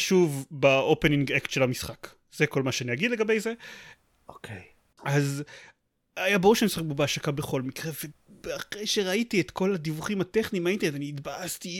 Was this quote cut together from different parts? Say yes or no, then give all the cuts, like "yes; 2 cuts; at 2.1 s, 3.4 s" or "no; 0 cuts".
no; 0 cuts